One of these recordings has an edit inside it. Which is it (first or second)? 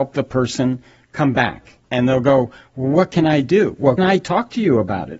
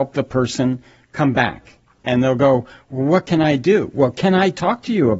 first